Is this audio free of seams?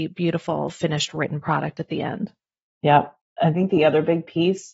yes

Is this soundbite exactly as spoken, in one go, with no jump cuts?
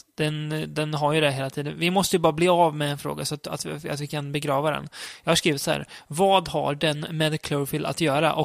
yes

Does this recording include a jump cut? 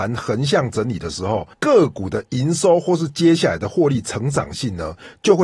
yes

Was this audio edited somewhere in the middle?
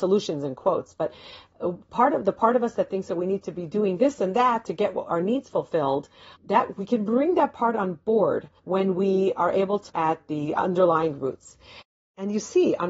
yes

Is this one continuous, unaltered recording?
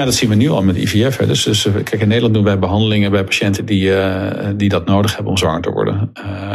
yes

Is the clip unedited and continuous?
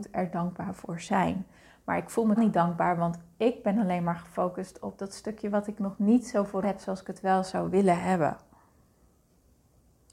no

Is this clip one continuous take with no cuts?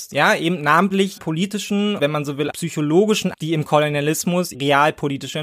no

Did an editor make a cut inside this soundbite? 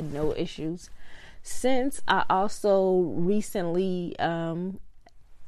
no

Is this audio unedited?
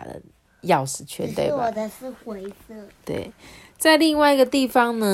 yes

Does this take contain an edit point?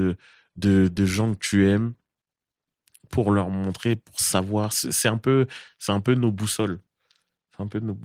no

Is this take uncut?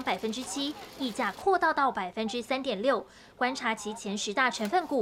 yes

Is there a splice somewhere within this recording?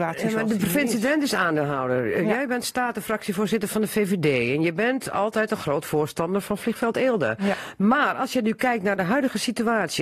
no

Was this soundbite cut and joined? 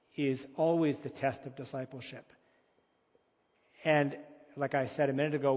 no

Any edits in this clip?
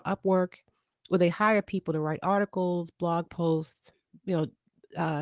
no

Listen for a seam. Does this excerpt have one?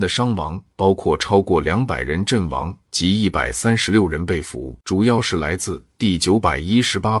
yes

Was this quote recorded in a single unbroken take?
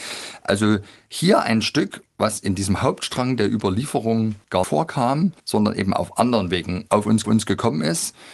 no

